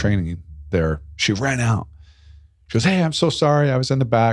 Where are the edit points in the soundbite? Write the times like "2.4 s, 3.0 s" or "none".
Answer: none